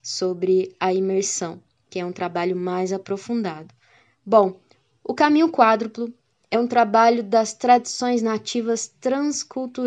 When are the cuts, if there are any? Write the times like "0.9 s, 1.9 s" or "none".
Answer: none